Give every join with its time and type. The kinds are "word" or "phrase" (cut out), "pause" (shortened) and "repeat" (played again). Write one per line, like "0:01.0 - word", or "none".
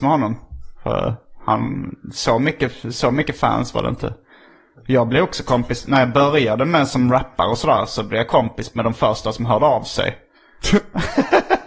none